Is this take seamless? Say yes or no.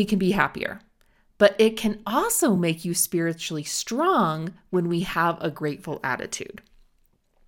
yes